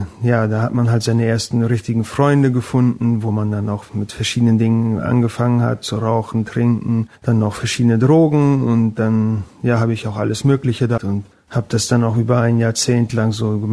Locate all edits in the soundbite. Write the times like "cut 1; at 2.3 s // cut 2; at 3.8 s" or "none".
cut 1; at 3.9 s // cut 2; at 7.2 s // cut 3; at 11.0 s // cut 4; at 11.3 s